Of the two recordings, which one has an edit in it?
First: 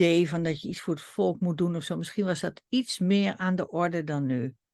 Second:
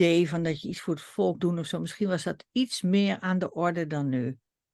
second; 1 cut; at 1.4 s

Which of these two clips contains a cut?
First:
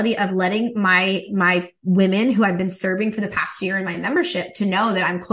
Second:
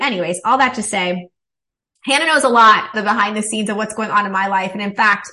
second; 1 cut; at 2.9 s

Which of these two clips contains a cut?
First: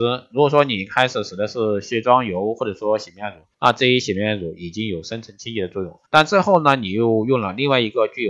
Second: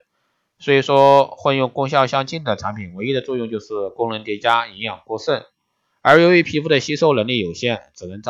first; 2 cuts; at 3.5 s, 6.1 s

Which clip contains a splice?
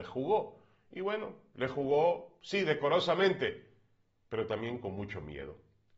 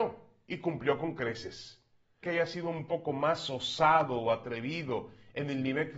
second; 1 cut; at 2.2 s

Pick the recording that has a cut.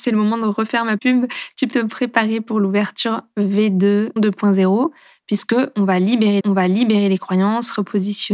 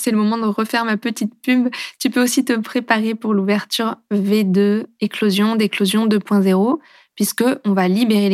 first; 4 cuts; at 1.0 s, 1.7 s, 4.2 s, 6.4 s

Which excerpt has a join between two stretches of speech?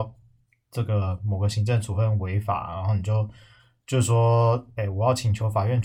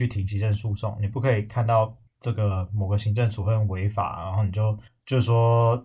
second; 2 cuts; at 2.1 s, 4.9 s

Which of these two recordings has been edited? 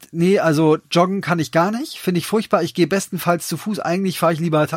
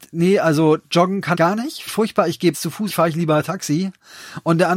second; 4 cuts; at 1.3 s, 1.9 s, 2.5 s, 2.9 s

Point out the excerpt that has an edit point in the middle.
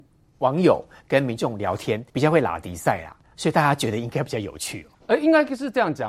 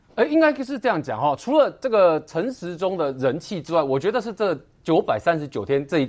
first; 2 cuts; at 2.1 s, 4.9 s

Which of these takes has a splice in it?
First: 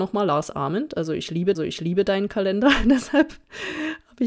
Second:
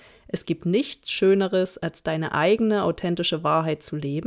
first; 1 cut; at 1.5 s

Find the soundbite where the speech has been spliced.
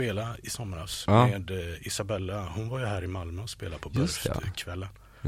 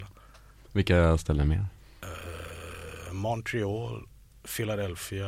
second; 1 cut; at 1.8 s

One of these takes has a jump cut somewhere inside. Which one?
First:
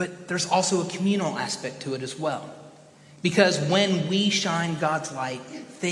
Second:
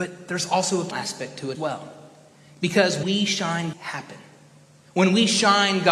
second; 4 cuts; at 0.9 s, 1.5 s, 3.0 s, 3.7 s

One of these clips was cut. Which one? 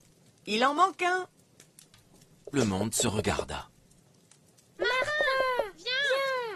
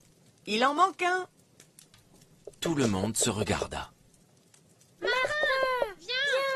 first; 1 cut; at 2.5 s

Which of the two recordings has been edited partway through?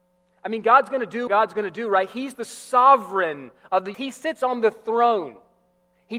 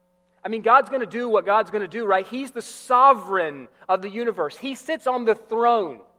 first; 2 cuts; at 1.3 s, 3.9 s

